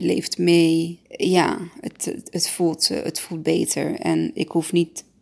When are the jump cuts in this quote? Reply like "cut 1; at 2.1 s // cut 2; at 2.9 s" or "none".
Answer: cut 1; at 1.0 s